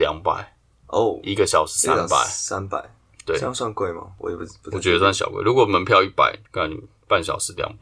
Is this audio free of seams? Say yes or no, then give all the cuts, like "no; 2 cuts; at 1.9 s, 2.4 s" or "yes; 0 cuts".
no; 1 cut; at 3.1 s